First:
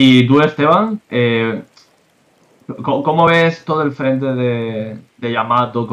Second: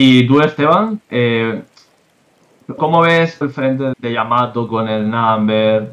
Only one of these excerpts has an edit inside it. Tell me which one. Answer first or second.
second